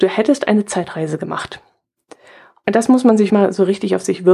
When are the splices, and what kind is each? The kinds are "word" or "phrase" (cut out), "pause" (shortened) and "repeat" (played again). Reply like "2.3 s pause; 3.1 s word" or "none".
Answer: 3.3 s word